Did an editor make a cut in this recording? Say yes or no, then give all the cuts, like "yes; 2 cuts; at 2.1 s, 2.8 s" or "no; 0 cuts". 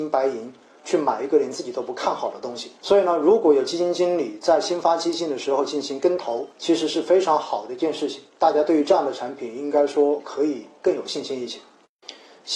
yes; 3 cuts; at 2.8 s, 6.5 s, 8.3 s